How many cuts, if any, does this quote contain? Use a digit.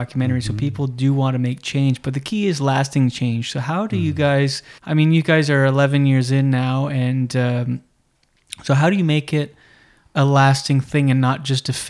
1